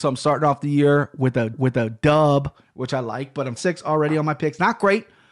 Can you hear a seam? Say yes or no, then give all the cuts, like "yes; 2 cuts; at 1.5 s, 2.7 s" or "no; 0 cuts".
yes; 2 cuts; at 1.5 s, 3.6 s